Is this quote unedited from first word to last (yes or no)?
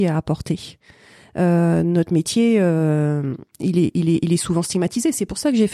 yes